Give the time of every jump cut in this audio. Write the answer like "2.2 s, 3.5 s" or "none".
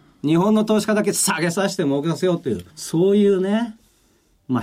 2.7 s

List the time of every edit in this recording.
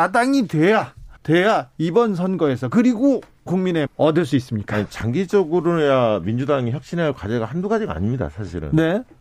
1.2 s, 3.5 s, 3.9 s

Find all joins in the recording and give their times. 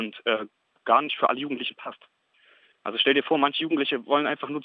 none

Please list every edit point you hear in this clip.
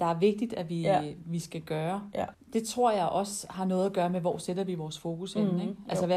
2.3 s

